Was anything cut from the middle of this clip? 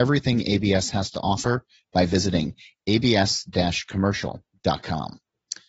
no; 0 cuts

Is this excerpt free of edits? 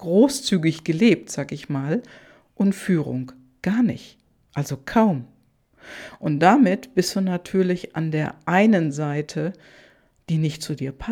yes; 0 cuts

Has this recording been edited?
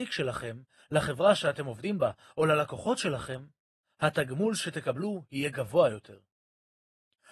no; 0 cuts

